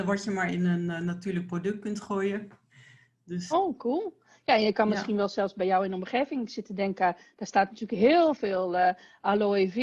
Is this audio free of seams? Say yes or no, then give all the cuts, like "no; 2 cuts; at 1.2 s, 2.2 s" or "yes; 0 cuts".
no; 1 cut; at 3.5 s